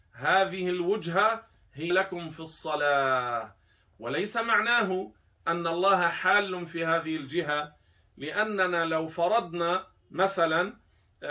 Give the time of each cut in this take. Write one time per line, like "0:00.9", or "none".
0:01.9